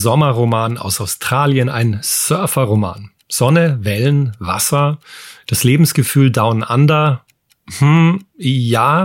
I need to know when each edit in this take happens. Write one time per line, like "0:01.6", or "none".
none

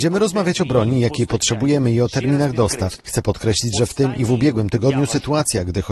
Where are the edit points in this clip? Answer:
0:03.0

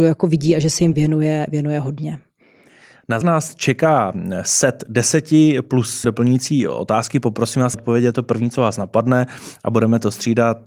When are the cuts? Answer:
0:00.9
0:03.2
0:06.0
0:07.7

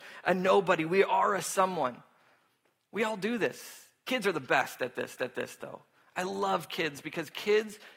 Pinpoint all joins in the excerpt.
0:05.2

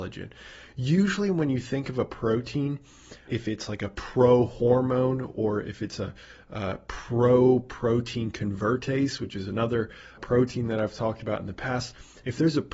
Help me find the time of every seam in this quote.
0:03.3
0:10.2

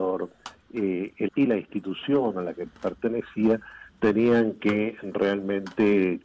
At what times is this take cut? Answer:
0:01.3
0:03.9

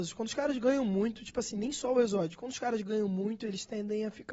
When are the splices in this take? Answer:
none

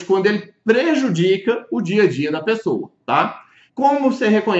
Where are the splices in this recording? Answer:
none

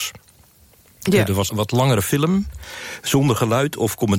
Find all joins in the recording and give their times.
0:01.5

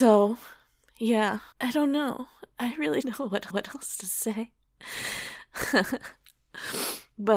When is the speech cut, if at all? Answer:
0:01.5
0:03.0
0:03.5

